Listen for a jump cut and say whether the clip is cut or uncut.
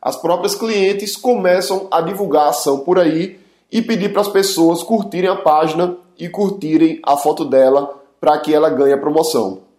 uncut